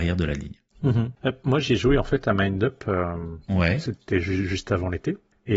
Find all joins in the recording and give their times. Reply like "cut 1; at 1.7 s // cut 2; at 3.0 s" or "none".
cut 1; at 1.2 s // cut 2; at 3.4 s